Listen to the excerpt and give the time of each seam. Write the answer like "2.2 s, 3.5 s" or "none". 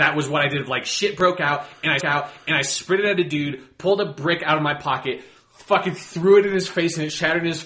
2.0 s